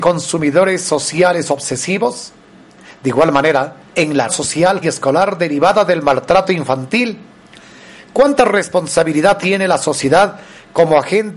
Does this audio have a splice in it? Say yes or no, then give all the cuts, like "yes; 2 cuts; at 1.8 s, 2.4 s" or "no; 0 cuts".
yes; 3 cuts; at 3.9 s, 4.3 s, 4.8 s